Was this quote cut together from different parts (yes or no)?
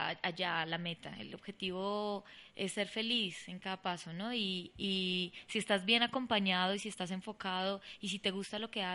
no